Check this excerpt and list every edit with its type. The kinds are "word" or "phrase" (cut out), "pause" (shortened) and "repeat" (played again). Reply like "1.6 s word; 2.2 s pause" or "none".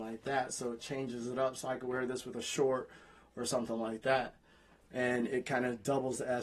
none